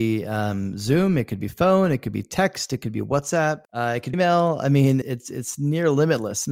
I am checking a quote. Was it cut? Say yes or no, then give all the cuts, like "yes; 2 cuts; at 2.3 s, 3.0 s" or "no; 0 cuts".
yes; 3 cuts; at 3.6 s, 4.1 s, 5.0 s